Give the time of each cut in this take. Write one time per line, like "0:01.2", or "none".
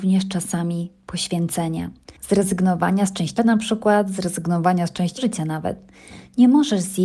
0:02.2
0:03.4
0:05.2